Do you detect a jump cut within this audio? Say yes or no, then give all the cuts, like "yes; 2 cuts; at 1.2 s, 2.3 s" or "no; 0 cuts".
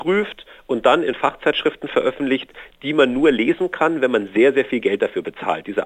no; 0 cuts